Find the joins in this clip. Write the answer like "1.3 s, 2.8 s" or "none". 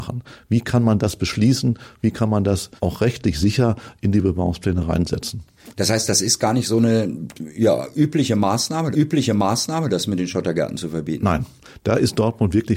2.8 s, 8.9 s